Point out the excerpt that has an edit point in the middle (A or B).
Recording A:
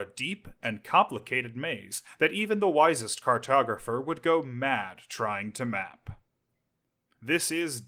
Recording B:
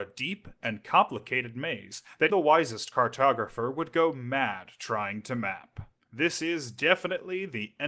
B